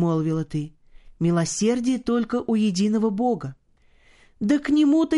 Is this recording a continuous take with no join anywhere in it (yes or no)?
yes